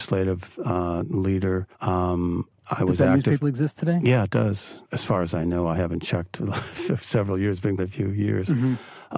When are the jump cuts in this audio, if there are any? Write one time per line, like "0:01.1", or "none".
0:01.7
0:03.4
0:04.8
0:07.8